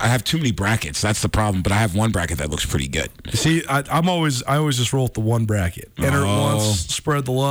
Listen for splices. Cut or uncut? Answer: uncut